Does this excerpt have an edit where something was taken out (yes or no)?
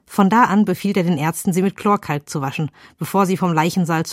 no